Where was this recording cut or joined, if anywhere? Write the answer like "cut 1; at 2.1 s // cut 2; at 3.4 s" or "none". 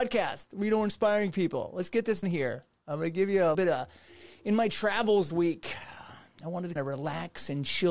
cut 1; at 2.2 s // cut 2; at 3.5 s // cut 3; at 5.3 s // cut 4; at 6.8 s

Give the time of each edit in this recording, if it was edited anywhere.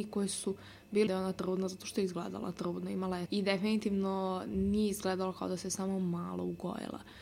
cut 1; at 1.1 s // cut 2; at 3.3 s

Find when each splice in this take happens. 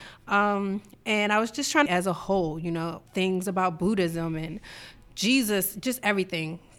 cut 1; at 1.9 s // cut 2; at 3.1 s

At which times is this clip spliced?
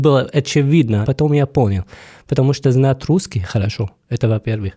cut 1; at 1.0 s // cut 2; at 2.6 s

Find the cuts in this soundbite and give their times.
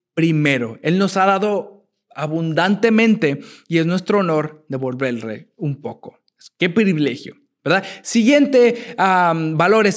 none

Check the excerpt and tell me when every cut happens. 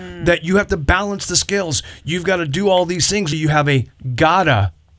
cut 1; at 3.3 s

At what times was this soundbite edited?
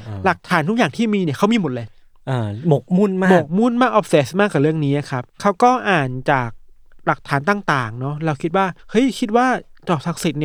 cut 1; at 5.3 s // cut 2; at 8.8 s

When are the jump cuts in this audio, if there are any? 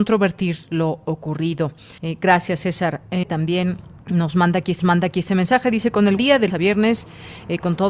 cut 1; at 2.0 s // cut 2; at 3.2 s // cut 3; at 4.0 s // cut 4; at 4.8 s // cut 5; at 6.2 s // cut 6; at 6.5 s

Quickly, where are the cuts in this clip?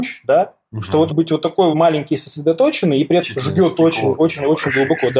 cut 1; at 1.1 s // cut 2; at 1.7 s // cut 3; at 3.2 s

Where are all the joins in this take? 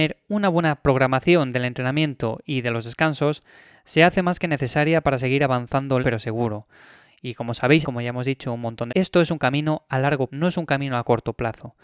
cut 1; at 6.0 s // cut 2; at 7.8 s // cut 3; at 8.9 s // cut 4; at 10.3 s

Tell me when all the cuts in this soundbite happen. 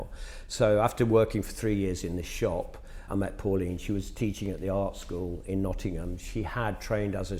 cut 1; at 3.1 s

